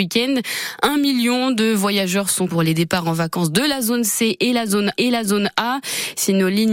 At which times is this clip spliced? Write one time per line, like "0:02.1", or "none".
0:02.5
0:05.0